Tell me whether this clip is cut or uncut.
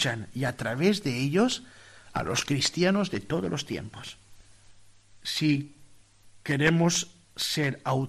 uncut